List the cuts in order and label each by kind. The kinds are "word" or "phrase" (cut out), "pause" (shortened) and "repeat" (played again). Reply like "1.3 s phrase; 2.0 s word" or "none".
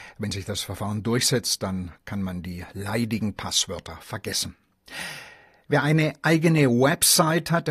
none